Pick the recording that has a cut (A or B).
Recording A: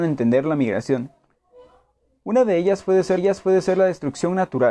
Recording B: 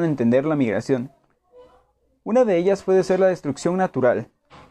A